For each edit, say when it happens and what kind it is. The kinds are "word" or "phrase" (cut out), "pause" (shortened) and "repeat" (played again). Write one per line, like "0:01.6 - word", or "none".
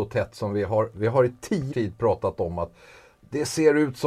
0:01.7 - word